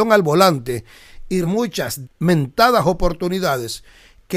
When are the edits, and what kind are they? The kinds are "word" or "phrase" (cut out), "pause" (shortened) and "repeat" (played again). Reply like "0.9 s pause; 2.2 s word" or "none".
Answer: 1.4 s word; 2.0 s phrase